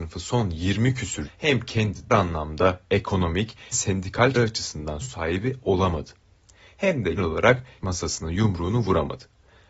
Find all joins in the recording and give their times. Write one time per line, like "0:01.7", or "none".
0:01.2
0:02.1
0:03.7
0:04.3
0:05.0
0:07.2
0:07.8